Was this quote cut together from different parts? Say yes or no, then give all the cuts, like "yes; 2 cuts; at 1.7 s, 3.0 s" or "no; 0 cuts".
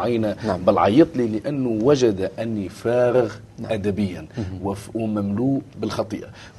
no; 0 cuts